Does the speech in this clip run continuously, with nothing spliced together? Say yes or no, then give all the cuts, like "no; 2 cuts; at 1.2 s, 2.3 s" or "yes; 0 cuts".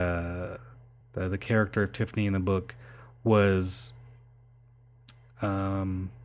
no; 1 cut; at 1.0 s